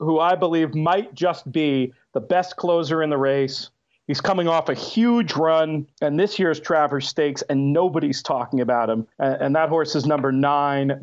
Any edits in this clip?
yes; 2 cuts; at 5.9 s, 9.1 s

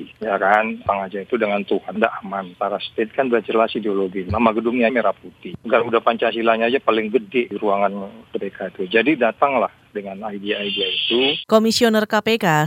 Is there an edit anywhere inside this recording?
yes; 2 cuts; at 2.0 s, 4.9 s

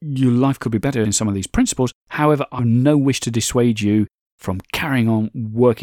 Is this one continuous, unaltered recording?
no; 2 cuts; at 1.0 s, 2.6 s

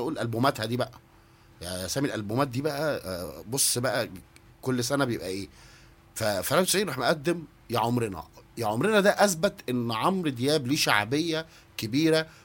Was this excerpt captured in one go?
yes; 0 cuts

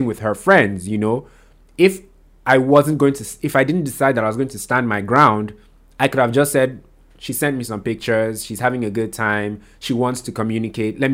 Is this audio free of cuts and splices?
yes; 0 cuts

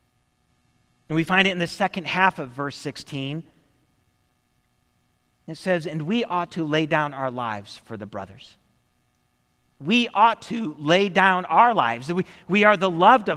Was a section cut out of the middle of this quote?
no; 0 cuts

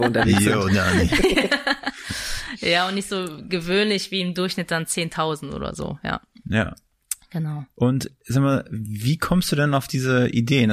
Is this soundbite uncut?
yes; 0 cuts

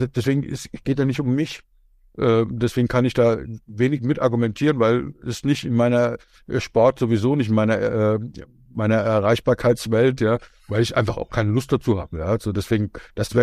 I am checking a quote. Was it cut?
no; 0 cuts

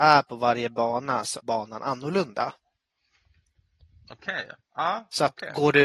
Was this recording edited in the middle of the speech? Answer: yes; 1 cut; at 1.4 s

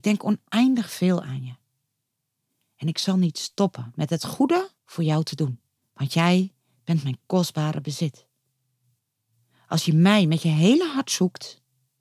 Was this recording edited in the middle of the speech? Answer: yes; 2 cuts; at 4.8 s, 5.8 s

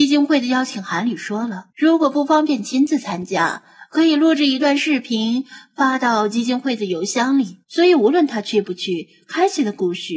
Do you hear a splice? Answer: yes; 2 cuts; at 1.7 s, 7.6 s

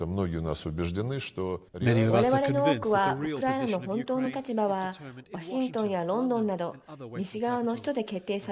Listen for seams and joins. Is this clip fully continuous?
no; 1 cut; at 1.7 s

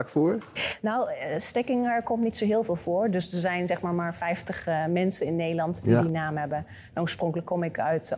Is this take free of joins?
yes; 0 cuts

